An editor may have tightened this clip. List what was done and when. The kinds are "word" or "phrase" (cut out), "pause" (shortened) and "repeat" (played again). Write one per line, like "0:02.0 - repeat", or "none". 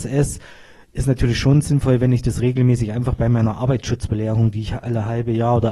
none